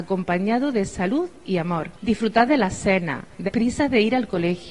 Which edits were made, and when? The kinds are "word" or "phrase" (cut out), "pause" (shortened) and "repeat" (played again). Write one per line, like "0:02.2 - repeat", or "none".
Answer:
0:02.0 - pause
0:03.5 - word